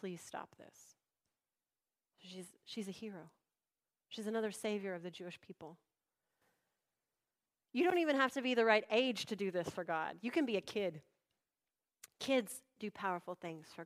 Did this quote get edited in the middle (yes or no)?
no